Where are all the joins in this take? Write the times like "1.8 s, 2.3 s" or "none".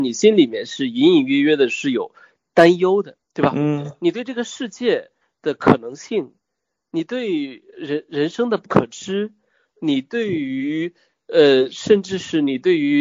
3.2 s